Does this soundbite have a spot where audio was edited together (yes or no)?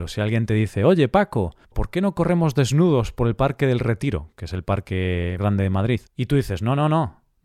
yes